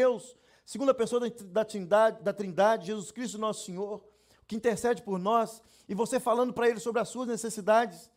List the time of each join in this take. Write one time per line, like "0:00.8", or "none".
none